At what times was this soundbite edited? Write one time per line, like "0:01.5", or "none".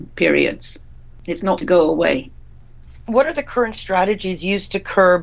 0:01.6